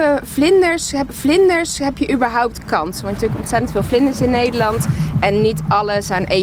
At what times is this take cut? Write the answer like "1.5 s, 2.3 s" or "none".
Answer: 1.1 s, 3.2 s